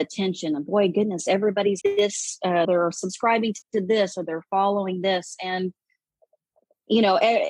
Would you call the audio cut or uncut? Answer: cut